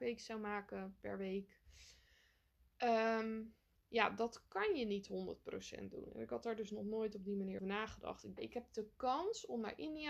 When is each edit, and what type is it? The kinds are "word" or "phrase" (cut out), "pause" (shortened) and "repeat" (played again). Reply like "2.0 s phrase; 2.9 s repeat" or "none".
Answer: 3.8 s pause; 7.6 s word; 8.4 s phrase

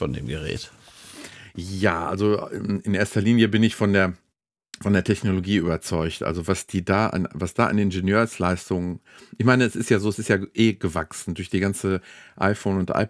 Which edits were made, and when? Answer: none

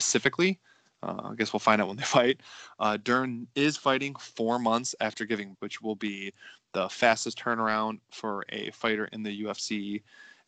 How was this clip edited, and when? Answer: 5.5 s word

